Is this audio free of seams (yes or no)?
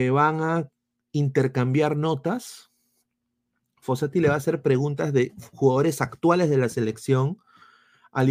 yes